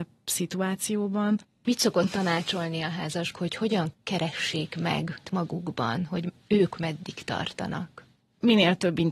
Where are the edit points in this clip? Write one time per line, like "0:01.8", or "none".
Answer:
0:03.3
0:05.2
0:06.7

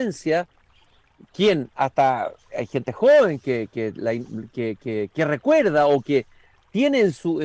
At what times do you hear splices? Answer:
none

